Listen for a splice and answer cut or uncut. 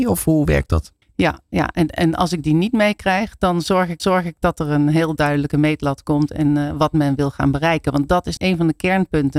cut